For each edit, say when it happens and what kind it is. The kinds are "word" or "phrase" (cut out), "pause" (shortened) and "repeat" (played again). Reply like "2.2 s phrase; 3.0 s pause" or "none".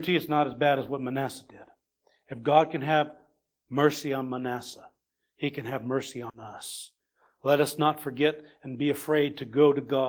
none